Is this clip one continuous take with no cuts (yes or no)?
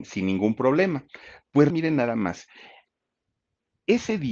no